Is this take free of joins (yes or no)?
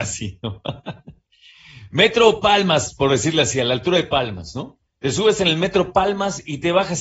no